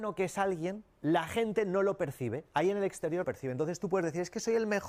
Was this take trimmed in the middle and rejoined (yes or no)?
yes